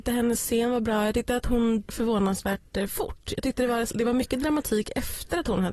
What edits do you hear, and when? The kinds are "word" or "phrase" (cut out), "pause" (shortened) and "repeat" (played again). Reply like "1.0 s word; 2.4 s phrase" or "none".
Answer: 1.9 s word; 3.9 s word

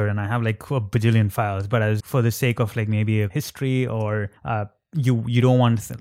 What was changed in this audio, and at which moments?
2.0 s word; 3.3 s word; 4.4 s pause

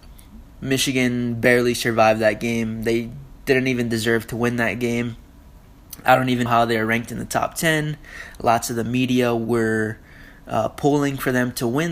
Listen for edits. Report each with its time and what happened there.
6.5 s word

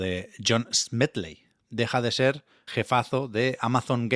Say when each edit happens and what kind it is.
1.7 s word; 2.7 s word

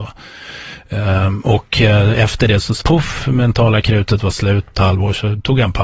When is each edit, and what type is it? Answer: 2.8 s word; 4.7 s word

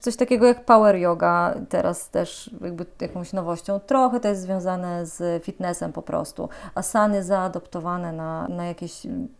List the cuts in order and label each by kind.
none

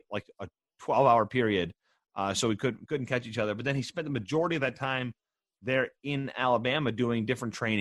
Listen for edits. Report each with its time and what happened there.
none

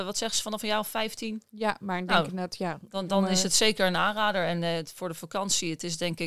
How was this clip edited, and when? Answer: none

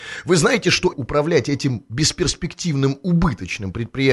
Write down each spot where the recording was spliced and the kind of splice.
0.9 s word

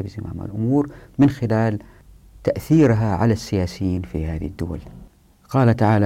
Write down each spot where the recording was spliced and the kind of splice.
none

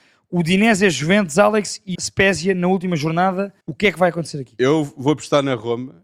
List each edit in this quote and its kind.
1.9 s word; 3.6 s pause

